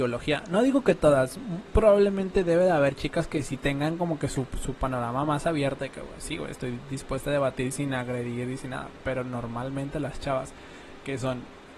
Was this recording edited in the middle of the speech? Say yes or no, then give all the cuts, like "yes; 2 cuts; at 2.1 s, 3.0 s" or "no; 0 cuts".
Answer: yes; 1 cut; at 1.7 s